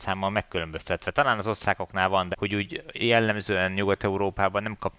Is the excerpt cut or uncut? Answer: cut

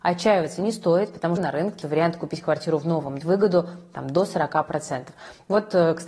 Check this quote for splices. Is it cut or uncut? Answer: cut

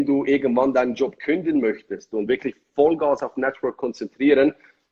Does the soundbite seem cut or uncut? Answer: uncut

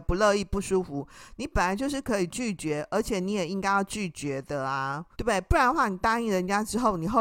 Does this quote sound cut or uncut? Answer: cut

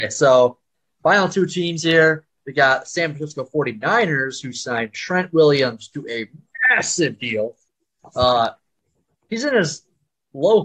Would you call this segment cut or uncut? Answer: uncut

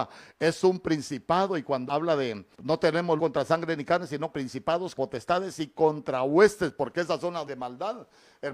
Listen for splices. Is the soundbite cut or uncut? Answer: cut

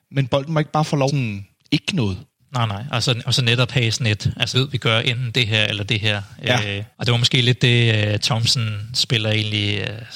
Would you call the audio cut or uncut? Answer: cut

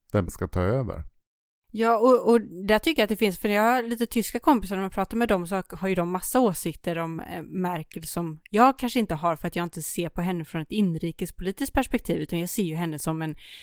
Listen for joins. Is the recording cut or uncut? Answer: uncut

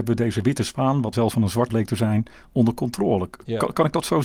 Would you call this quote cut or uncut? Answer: cut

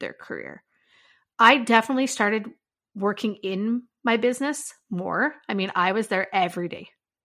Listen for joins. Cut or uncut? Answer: uncut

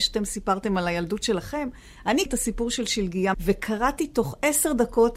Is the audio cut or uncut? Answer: cut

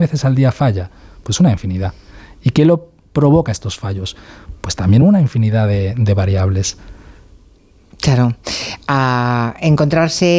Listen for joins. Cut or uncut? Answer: uncut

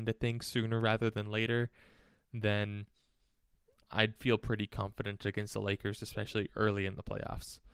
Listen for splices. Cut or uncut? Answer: uncut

